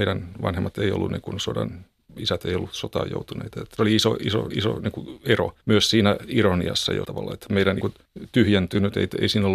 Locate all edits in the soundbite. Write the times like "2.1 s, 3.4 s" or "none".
2.1 s, 3.8 s, 4.5 s, 5.6 s, 7.0 s, 7.8 s